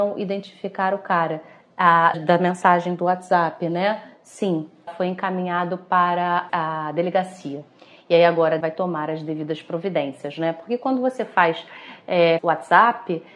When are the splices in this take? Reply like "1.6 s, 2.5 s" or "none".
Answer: 2.1 s, 4.9 s, 6.5 s, 8.6 s, 12.4 s